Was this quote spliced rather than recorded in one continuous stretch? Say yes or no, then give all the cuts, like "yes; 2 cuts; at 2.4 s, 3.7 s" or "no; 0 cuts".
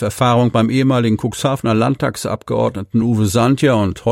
no; 0 cuts